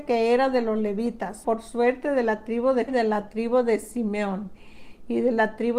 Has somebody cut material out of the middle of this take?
yes; 2 cuts; at 1.4 s, 2.9 s

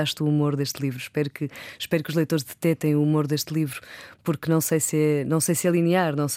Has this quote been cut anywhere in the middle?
no; 0 cuts

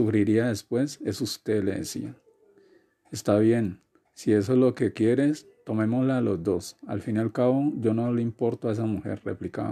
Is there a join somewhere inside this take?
no; 0 cuts

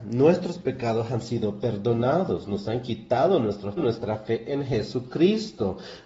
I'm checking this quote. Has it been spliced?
yes; 1 cut; at 3.8 s

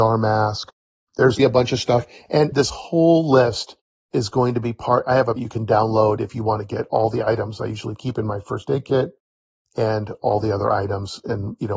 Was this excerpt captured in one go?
no; 3 cuts; at 1.4 s, 2.5 s, 5.4 s

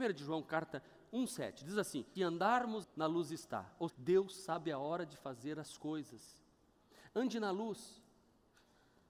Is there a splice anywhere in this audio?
yes; 3 cuts; at 2.2 s, 2.8 s, 3.9 s

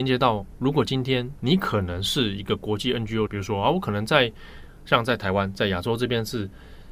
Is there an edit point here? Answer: yes; 1 cut; at 3.3 s

